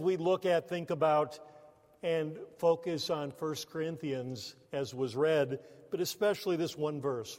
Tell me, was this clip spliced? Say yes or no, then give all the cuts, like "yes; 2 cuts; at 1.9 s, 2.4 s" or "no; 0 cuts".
yes; 1 cut; at 4.6 s